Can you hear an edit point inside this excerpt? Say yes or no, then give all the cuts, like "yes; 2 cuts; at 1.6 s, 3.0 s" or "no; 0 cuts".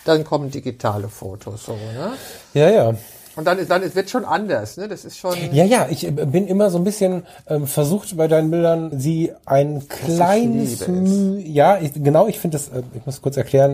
yes; 2 cuts; at 3.7 s, 8.9 s